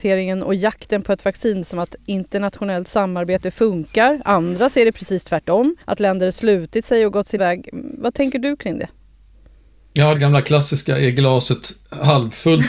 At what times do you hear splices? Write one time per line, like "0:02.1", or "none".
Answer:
0:05.8
0:07.4
0:10.1